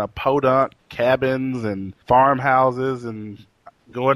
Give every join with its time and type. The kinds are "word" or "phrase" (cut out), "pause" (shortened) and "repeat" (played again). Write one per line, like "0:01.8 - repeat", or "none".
0:02.0 - pause